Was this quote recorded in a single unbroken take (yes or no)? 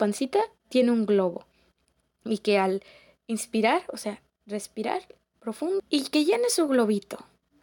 no